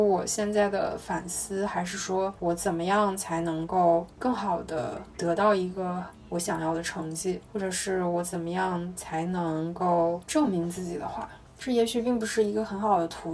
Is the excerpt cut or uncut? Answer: cut